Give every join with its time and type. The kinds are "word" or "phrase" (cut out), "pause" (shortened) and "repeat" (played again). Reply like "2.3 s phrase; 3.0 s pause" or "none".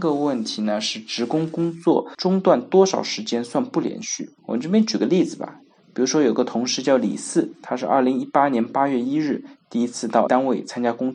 4.4 s pause; 10.3 s word